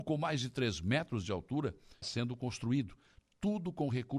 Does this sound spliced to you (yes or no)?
yes